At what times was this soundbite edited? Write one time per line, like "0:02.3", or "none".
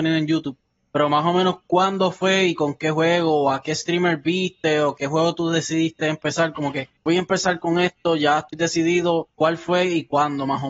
0:07.0
0:09.3